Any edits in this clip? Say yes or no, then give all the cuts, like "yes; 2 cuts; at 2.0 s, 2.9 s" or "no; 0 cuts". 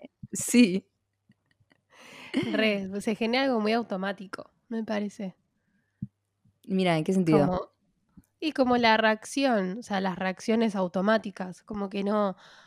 no; 0 cuts